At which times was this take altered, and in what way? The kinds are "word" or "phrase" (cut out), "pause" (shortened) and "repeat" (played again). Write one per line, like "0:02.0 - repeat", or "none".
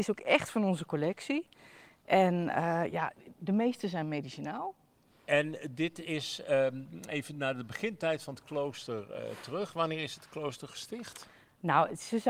none